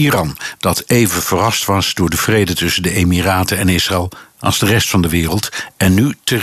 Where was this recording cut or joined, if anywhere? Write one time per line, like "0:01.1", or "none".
none